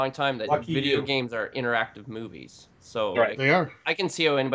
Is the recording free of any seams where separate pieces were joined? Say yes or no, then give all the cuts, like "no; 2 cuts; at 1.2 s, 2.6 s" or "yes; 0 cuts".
yes; 0 cuts